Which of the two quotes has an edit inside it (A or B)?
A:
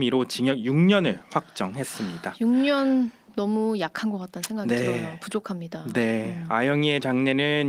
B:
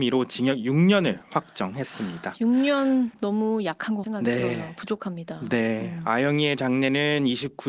B